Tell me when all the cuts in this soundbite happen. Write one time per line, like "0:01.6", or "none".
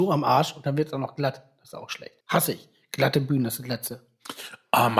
0:02.2